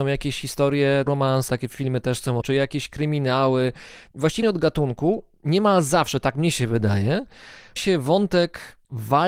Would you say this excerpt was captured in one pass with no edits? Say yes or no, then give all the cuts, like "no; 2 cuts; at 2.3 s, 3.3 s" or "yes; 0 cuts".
no; 5 cuts; at 1.1 s, 1.5 s, 2.4 s, 4.4 s, 7.8 s